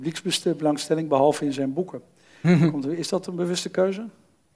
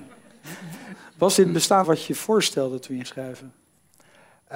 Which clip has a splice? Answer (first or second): second